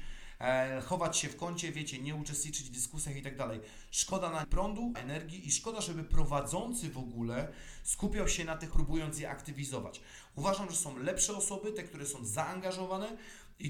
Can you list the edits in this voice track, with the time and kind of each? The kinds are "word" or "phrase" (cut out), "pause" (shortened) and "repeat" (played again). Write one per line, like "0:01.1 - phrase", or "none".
0:04.4 - word
0:04.9 - word
0:08.7 - word